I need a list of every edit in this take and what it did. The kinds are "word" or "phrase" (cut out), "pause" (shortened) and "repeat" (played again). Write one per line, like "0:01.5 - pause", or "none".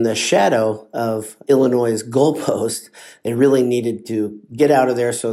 0:01.4 - word